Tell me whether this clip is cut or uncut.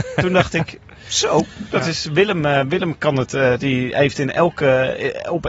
uncut